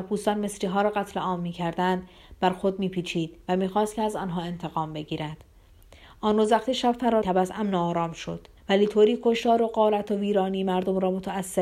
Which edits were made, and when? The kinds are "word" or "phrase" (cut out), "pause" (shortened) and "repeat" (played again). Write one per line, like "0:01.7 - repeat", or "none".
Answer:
0:07.2 - word
0:08.6 - pause